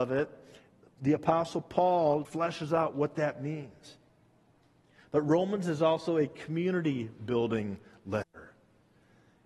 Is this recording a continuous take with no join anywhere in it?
no; 1 cut; at 2.2 s

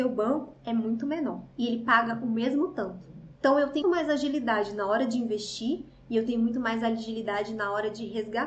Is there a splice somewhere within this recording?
yes; 3 cuts; at 1.5 s, 3.3 s, 3.8 s

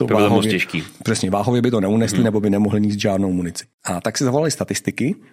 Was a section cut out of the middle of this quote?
yes; 1 cut; at 3.7 s

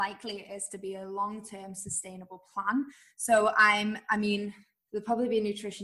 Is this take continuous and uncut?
yes; 0 cuts

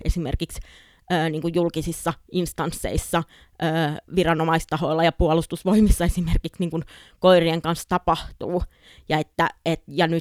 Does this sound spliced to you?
no; 0 cuts

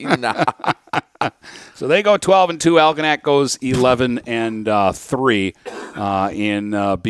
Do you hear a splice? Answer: no; 0 cuts

